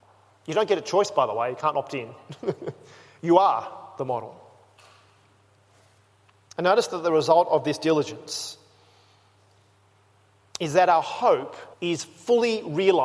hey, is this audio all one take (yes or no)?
no